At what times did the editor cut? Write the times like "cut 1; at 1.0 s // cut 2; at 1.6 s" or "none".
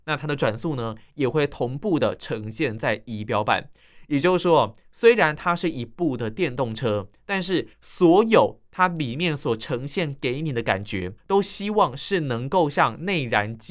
cut 1; at 7.7 s // cut 2; at 11.2 s

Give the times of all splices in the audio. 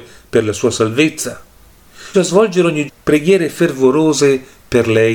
cut 1; at 2.1 s // cut 2; at 2.9 s

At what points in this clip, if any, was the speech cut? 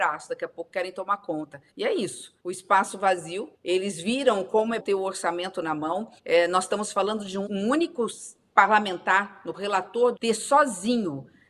cut 1; at 1.7 s // cut 2; at 2.4 s // cut 3; at 3.5 s // cut 4; at 4.8 s // cut 5; at 6.2 s // cut 6; at 7.5 s // cut 7; at 9.5 s // cut 8; at 10.2 s

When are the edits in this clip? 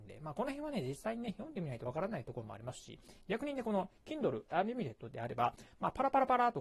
none

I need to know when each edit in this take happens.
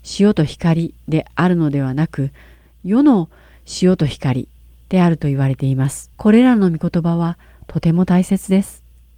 cut 1; at 6.1 s

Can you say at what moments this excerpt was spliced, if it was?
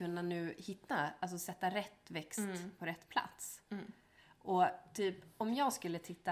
none

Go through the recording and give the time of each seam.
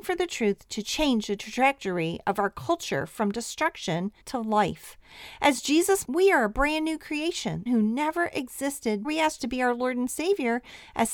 cut 1; at 4.2 s // cut 2; at 6.0 s // cut 3; at 7.7 s // cut 4; at 9.0 s // cut 5; at 9.4 s

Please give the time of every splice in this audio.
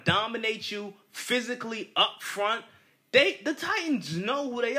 none

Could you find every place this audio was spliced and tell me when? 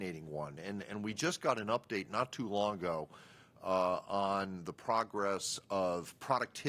none

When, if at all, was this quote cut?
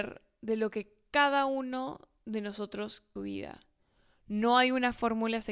cut 1; at 3.2 s

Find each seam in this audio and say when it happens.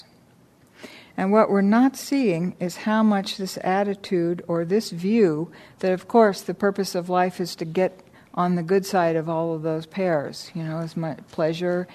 none

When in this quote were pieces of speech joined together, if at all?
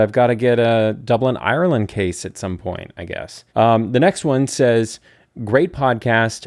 cut 1; at 3.5 s

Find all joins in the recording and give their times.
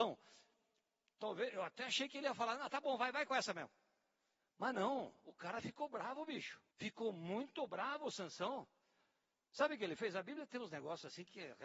cut 1; at 6.7 s

